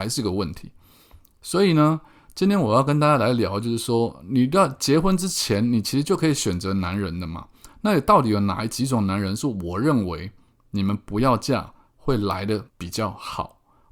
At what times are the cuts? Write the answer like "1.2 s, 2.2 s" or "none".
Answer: 12.7 s

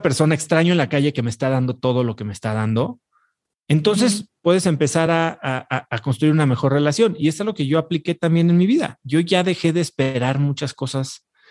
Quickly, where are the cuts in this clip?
none

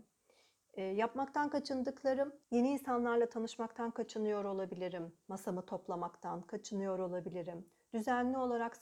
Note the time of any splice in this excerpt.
2.4 s

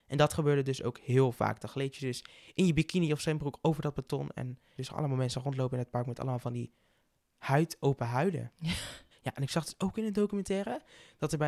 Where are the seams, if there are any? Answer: 4.8 s, 9.1 s

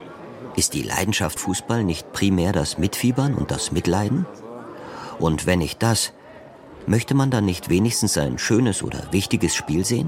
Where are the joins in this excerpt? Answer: 1.4 s

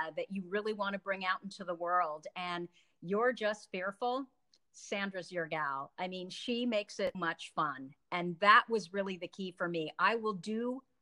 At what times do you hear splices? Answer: 7.1 s

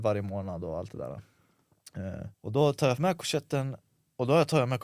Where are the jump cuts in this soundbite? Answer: 2.3 s

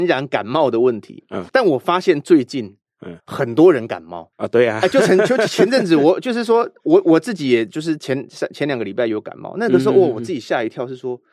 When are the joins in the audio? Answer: 1.5 s, 3.2 s, 4.3 s

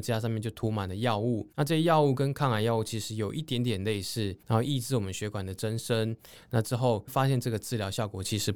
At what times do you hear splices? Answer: 1.5 s, 4.4 s, 7.1 s

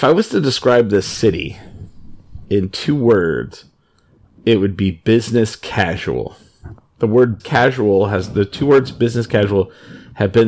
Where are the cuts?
7.4 s

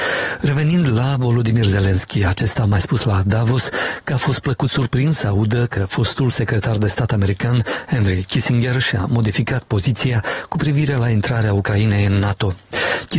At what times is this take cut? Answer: none

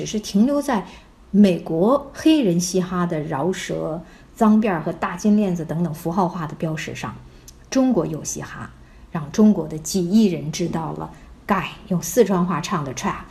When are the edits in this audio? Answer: none

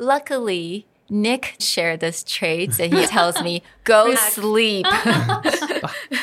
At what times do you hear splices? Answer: 1.6 s, 3.0 s, 4.1 s

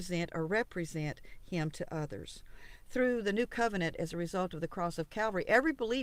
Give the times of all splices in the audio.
none

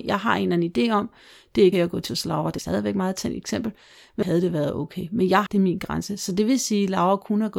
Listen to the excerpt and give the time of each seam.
1.7 s, 2.1 s, 2.6 s, 4.2 s, 5.5 s

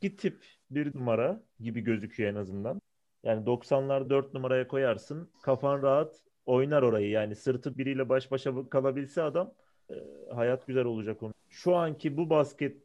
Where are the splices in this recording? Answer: 0.9 s, 1.5 s, 4.1 s, 5.3 s, 7.7 s, 10.6 s, 11.4 s

